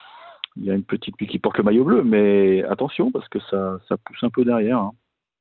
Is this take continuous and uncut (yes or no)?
no